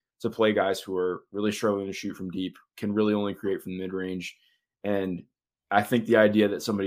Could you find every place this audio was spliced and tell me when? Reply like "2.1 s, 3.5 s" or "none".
none